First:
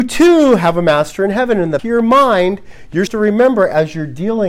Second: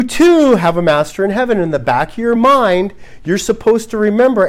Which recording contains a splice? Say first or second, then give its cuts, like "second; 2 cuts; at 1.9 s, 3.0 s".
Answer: first; 2 cuts; at 1.8 s, 3.1 s